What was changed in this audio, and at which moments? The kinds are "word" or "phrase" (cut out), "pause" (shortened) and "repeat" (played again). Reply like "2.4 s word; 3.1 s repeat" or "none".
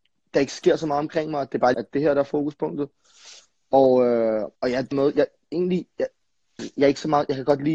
1.7 s word; 4.6 s pause; 4.9 s word; 6.6 s word